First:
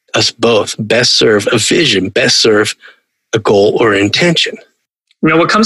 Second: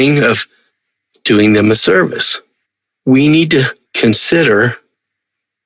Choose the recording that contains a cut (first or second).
second